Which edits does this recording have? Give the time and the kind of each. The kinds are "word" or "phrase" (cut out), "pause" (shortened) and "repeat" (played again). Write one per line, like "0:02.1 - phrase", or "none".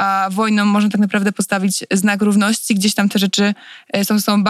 none